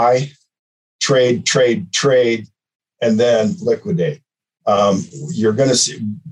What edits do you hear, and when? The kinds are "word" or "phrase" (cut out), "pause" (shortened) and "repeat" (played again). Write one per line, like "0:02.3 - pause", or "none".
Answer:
none